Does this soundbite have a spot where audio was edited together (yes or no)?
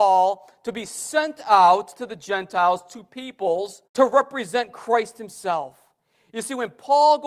yes